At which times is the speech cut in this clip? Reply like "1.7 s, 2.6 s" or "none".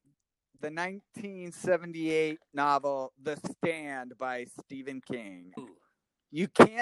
2.5 s, 5.6 s